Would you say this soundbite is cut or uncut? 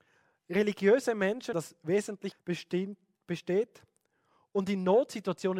cut